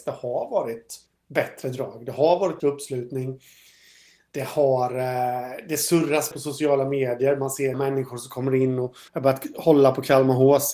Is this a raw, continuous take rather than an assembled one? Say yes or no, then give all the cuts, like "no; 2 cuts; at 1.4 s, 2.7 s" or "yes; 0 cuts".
no; 5 cuts; at 1.1 s, 2.6 s, 6.3 s, 7.7 s, 9.1 s